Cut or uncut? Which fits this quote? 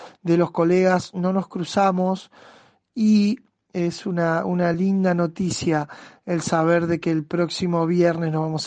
uncut